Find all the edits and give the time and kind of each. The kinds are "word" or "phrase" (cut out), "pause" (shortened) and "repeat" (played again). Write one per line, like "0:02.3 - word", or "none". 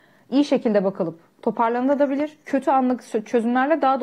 0:02.4 - pause

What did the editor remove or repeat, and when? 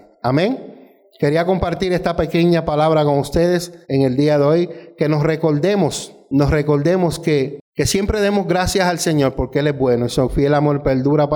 0:03.8 - pause

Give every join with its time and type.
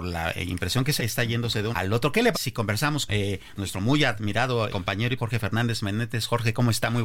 0:01.0 - word
0:01.7 - word
0:02.3 - word
0:03.1 - word
0:03.6 - word
0:04.7 - word
0:05.2 - word

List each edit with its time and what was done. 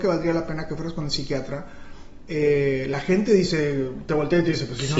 none

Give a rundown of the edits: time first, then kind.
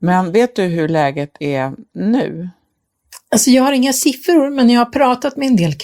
none

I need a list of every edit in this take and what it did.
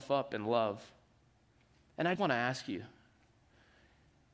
0:02.2 - word

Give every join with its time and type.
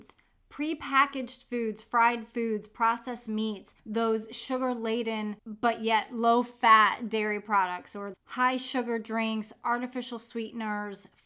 0:03.8 - pause
0:05.4 - pause
0:08.1 - word

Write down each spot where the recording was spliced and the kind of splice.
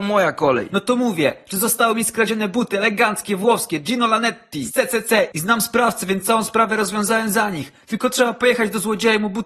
none

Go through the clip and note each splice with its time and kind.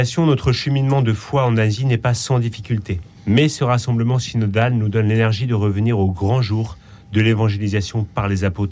0:03.2 - pause

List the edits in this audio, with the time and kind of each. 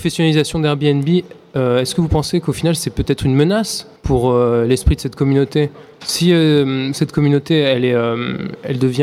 0:04.0 - pause

